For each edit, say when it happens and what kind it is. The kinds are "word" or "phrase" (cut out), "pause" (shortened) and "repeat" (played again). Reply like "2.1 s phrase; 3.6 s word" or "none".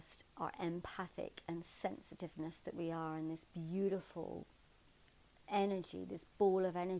none